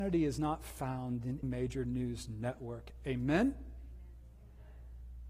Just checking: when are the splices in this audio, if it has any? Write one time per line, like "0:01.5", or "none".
0:01.4